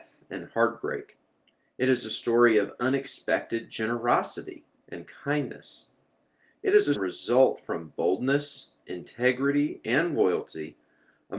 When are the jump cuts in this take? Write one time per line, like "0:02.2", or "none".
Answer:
0:06.9